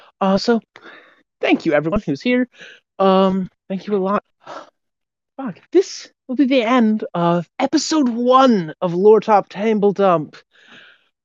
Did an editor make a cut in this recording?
yes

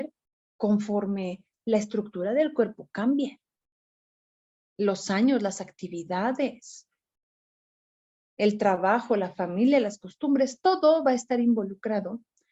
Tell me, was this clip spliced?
no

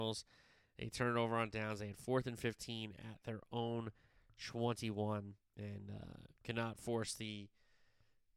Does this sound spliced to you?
yes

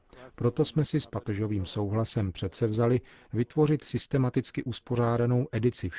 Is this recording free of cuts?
yes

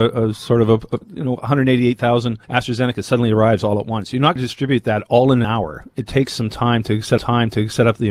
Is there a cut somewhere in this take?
yes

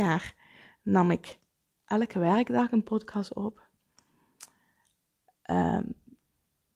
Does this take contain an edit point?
no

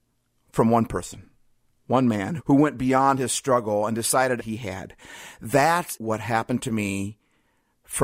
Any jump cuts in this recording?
yes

